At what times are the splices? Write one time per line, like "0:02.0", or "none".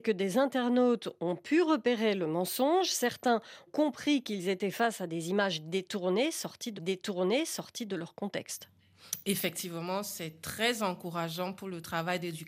0:03.7
0:06.8